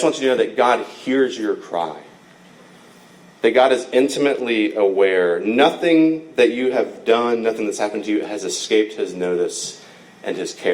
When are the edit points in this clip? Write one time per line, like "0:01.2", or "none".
none